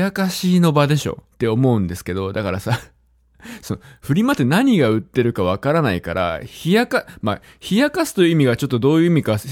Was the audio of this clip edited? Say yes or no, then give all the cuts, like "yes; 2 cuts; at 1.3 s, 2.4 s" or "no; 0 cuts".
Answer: yes; 1 cut; at 1.3 s